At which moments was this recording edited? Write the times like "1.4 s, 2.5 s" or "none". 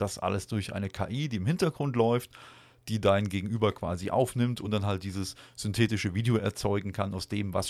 none